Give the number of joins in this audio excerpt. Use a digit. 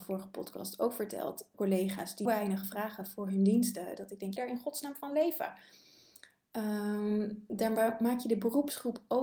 3